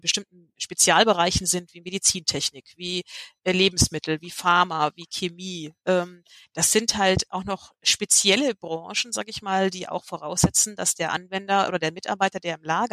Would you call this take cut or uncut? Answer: uncut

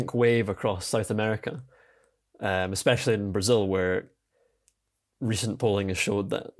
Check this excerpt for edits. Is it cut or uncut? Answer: uncut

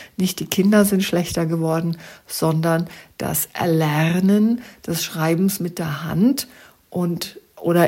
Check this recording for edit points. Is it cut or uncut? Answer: uncut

